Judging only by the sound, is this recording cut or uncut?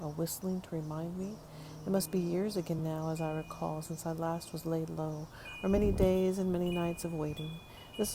uncut